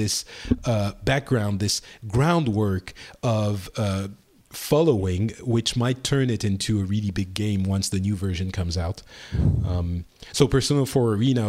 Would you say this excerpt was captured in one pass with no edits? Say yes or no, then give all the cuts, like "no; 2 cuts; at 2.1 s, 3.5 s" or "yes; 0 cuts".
yes; 0 cuts